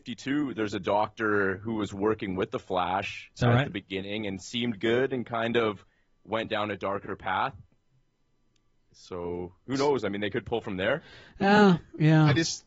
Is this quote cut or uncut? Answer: uncut